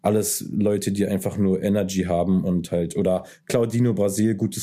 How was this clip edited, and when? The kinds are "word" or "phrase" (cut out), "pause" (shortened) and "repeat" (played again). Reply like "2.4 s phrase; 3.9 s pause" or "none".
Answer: none